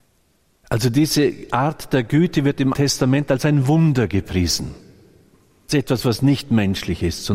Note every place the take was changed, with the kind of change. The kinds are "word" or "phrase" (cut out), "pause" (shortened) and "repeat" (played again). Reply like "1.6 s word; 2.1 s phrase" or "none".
2.7 s word; 5.7 s word